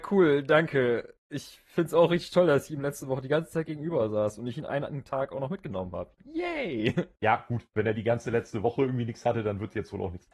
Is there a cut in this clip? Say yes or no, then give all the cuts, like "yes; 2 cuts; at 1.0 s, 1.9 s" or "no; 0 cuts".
yes; 1 cut; at 1.2 s